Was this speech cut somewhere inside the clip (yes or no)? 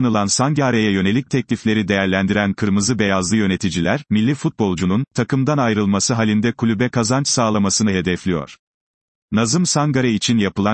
no